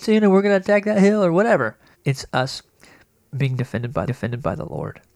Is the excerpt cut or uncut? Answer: cut